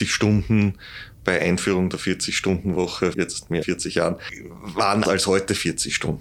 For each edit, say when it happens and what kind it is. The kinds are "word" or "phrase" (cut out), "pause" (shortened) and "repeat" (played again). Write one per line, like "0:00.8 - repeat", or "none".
0:03.1 - word
0:03.6 - word
0:05.0 - word